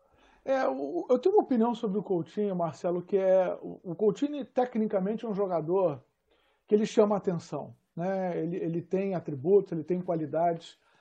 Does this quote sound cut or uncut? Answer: uncut